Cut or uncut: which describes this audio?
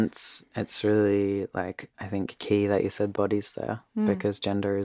cut